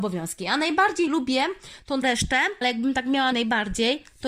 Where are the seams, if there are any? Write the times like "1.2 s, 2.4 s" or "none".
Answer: 1.1 s, 2.0 s, 2.6 s, 3.3 s